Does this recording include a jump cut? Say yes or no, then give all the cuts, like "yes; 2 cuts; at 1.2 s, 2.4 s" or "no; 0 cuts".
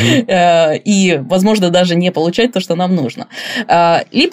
no; 0 cuts